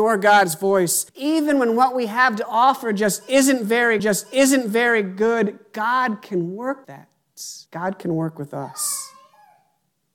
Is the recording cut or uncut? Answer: cut